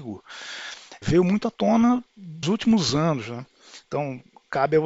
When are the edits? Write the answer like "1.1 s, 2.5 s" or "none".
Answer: 1.0 s, 2.4 s